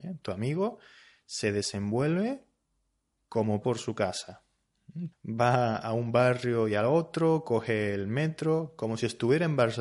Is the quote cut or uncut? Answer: cut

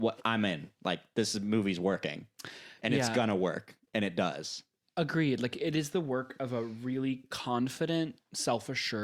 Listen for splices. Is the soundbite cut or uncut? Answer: uncut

